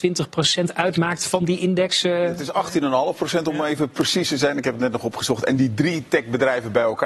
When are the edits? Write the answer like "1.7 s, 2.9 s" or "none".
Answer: none